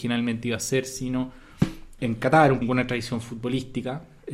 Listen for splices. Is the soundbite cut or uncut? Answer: cut